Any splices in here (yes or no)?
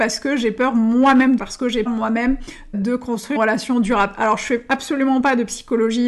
yes